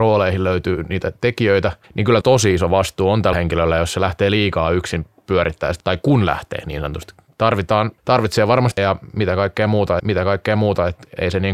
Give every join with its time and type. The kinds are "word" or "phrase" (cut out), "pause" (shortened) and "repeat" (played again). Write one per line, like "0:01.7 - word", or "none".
0:01.8 - pause
0:02.2 - word
0:03.3 - word
0:05.8 - word
0:08.0 - pause
0:08.8 - word
0:10.0 - repeat